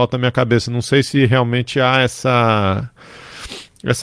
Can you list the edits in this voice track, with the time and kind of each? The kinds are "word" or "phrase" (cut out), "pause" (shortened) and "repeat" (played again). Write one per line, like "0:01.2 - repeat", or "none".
none